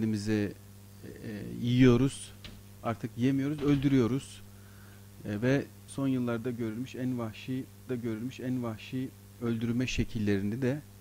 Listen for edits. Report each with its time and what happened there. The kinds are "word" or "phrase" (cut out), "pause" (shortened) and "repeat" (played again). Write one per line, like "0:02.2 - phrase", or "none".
0:05.9 - word
0:07.9 - repeat